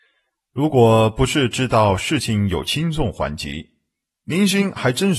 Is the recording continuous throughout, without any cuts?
yes; 0 cuts

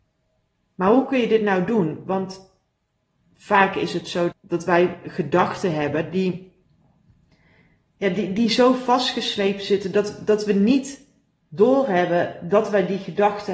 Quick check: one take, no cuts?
no; 1 cut; at 4.3 s

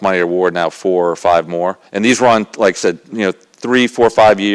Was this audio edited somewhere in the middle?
yes; 1 cut; at 1.9 s

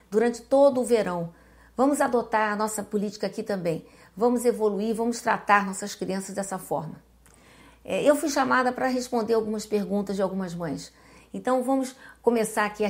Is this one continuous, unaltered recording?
yes; 0 cuts

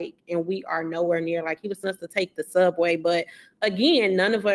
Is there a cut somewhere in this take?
yes; 1 cut; at 1.8 s

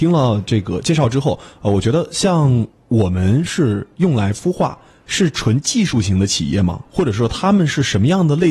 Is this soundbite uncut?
yes; 0 cuts

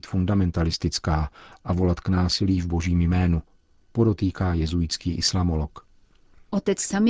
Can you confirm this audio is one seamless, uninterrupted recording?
yes; 0 cuts

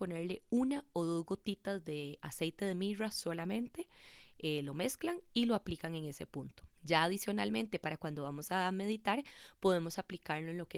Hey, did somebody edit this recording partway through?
yes; 1 cut; at 6.7 s

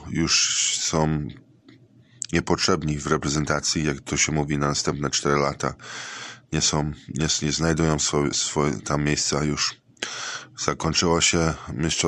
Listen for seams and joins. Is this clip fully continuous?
yes; 0 cuts

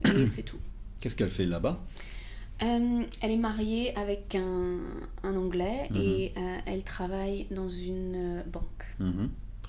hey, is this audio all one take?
yes; 0 cuts

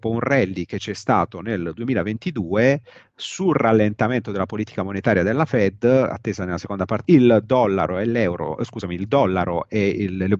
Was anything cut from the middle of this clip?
yes; 1 cut; at 7.0 s

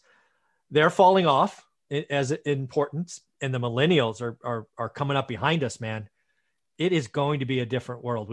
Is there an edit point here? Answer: no; 0 cuts

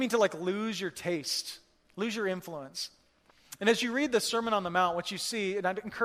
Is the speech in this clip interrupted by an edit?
no; 0 cuts

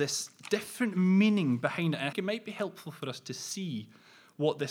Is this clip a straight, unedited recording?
no; 1 cut; at 2.1 s

